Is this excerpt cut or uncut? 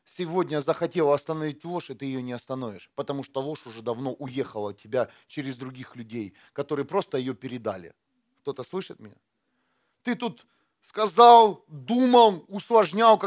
uncut